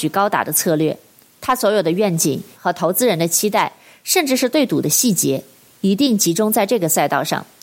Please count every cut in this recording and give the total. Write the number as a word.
one